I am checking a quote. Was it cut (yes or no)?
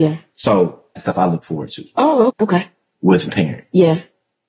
yes